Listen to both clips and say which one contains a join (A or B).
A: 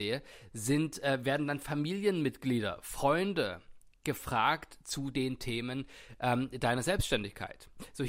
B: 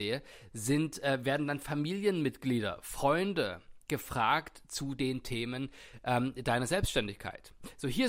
B